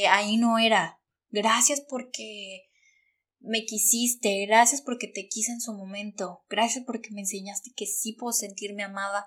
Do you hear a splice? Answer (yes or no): no